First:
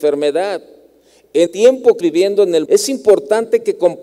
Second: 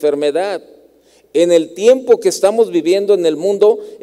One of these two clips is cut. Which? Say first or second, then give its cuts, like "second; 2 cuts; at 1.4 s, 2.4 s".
first; 3 cuts; at 1.5 s, 2.0 s, 2.6 s